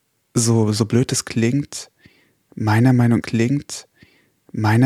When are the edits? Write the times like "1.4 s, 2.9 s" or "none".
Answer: 3.2 s